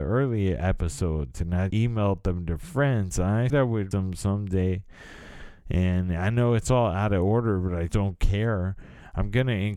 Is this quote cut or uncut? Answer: cut